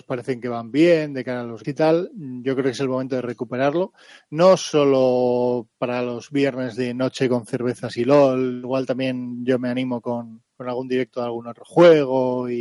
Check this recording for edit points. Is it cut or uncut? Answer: cut